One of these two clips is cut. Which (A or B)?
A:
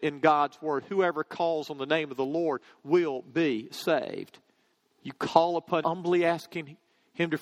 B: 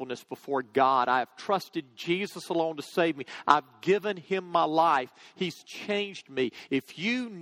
A